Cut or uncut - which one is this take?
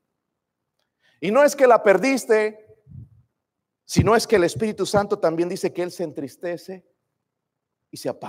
uncut